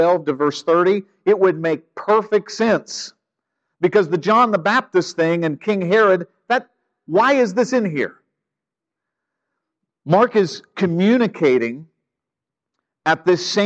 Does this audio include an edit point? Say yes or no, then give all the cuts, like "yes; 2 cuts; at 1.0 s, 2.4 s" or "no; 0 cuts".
no; 0 cuts